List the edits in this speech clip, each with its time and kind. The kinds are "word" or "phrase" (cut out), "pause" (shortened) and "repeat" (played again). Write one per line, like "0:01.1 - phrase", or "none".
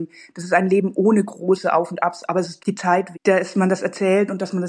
0:02.6 - word
0:03.1 - word